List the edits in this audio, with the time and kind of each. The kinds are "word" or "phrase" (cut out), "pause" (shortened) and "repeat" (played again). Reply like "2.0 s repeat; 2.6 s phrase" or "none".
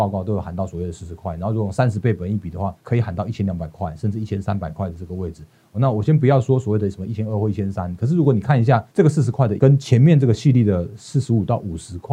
2.8 s pause; 8.9 s pause; 9.6 s word